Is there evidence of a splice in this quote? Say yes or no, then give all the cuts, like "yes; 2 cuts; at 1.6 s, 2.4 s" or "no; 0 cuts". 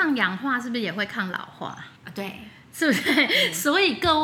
yes; 1 cut; at 2.0 s